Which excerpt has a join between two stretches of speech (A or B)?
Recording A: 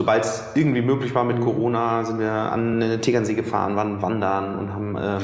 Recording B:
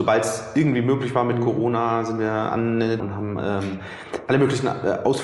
B